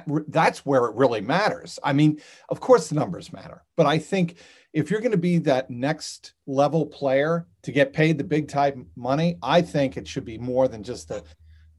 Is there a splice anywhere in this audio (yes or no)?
no